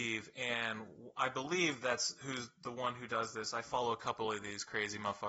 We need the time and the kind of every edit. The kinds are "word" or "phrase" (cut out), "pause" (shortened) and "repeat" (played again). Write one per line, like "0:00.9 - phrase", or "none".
none